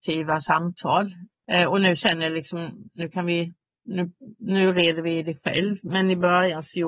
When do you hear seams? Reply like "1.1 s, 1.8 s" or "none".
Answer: none